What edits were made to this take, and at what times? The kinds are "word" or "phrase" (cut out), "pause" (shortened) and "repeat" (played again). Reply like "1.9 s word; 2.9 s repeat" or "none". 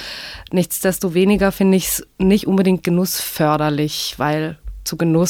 2.1 s pause